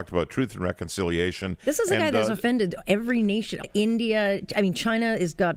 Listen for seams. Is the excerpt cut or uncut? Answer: cut